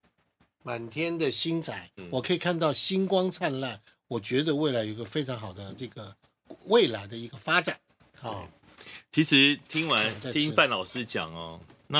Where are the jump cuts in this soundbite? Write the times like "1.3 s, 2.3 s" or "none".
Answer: 1.9 s